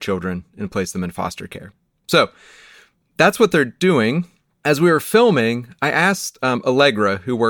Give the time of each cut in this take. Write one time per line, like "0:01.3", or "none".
none